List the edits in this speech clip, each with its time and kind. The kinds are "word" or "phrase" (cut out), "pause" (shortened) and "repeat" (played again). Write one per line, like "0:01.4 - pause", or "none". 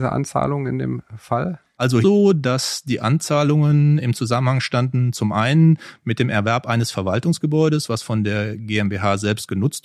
0:02.0 - phrase